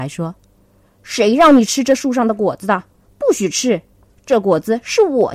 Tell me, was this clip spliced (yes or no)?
no